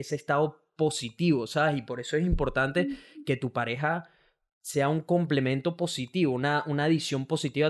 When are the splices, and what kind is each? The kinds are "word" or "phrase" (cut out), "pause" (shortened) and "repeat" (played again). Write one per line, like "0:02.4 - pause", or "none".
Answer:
none